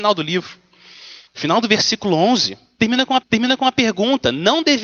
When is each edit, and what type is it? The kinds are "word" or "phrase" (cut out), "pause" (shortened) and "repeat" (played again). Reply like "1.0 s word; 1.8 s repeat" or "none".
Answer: 1.3 s pause; 3.2 s repeat